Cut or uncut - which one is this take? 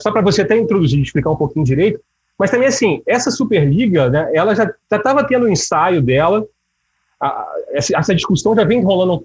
uncut